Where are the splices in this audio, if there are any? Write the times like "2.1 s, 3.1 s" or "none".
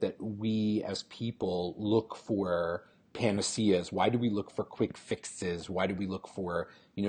none